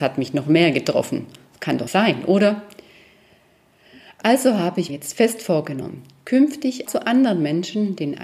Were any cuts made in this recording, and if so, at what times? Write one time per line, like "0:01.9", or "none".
0:01.9
0:04.9
0:06.9